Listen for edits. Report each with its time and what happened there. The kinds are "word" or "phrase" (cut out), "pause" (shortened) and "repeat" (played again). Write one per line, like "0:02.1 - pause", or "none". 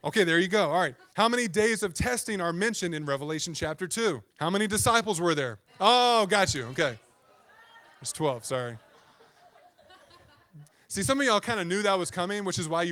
0:01.1 - pause
0:04.3 - pause
0:05.7 - pause
0:10.7 - pause

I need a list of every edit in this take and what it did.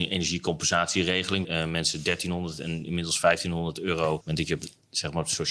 0:01.4 - word
0:04.2 - word

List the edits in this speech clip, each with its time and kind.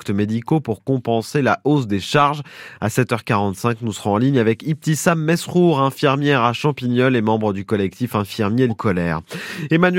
0:08.7 - word

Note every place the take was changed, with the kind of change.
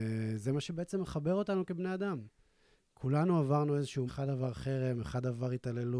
0:04.1 - word

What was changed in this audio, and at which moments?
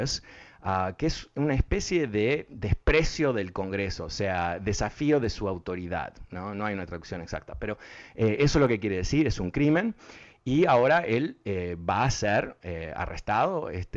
0:12.6 - word

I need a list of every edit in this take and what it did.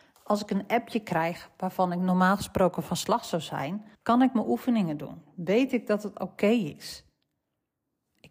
0:03.9 - pause

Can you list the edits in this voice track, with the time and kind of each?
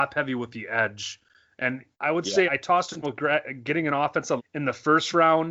0:01.9 - pause
0:02.5 - word
0:03.0 - word
0:04.4 - word

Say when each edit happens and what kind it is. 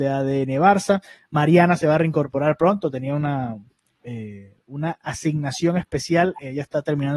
none

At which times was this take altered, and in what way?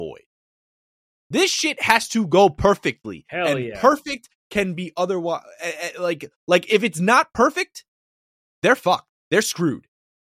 none

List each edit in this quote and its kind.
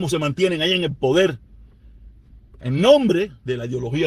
none

